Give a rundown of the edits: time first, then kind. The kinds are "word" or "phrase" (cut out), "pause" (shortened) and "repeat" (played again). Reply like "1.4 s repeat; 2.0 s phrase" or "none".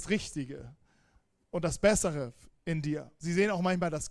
none